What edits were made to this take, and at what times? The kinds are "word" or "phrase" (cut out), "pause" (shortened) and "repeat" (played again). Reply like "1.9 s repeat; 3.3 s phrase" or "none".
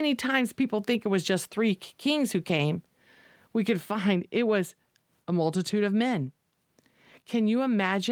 none